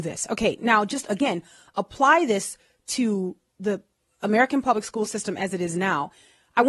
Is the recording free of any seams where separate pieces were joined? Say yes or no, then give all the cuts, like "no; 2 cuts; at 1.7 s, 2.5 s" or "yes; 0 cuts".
yes; 0 cuts